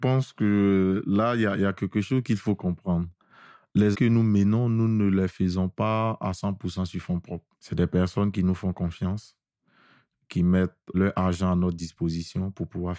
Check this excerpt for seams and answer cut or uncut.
cut